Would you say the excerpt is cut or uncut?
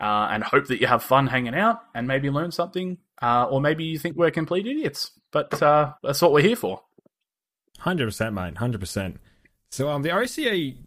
cut